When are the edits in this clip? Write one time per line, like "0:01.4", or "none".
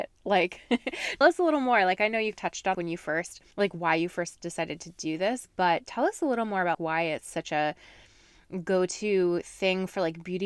0:01.2
0:02.3
0:02.7
0:03.5
0:06.7